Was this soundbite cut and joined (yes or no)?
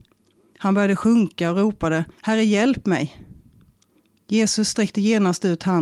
yes